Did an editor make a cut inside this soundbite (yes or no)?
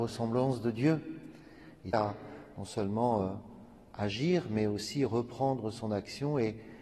yes